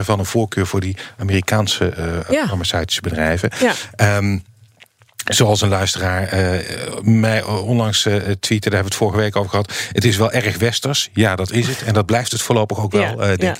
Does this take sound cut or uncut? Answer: uncut